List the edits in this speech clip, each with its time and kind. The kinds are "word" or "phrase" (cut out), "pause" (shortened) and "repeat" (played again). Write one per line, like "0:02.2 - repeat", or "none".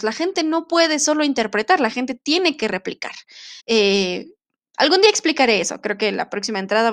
0:03.6 - pause